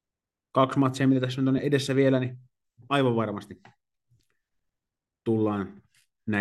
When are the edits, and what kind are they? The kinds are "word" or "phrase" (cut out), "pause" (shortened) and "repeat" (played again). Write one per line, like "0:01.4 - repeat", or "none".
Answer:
none